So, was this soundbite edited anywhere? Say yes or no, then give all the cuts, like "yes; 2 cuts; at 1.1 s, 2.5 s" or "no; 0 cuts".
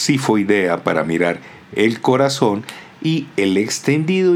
no; 0 cuts